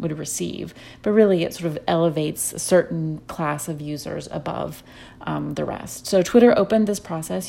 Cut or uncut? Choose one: uncut